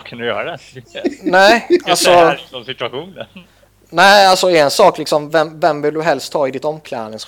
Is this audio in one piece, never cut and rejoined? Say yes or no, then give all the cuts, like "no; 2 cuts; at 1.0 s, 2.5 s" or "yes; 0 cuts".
yes; 0 cuts